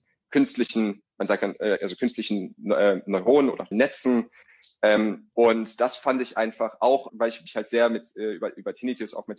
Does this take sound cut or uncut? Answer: cut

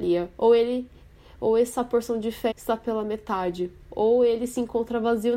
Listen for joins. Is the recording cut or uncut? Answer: cut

